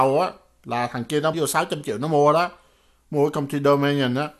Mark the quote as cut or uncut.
cut